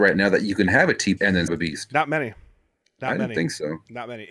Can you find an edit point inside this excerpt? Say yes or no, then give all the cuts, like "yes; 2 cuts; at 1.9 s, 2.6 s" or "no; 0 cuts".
yes; 2 cuts; at 1.2 s, 1.5 s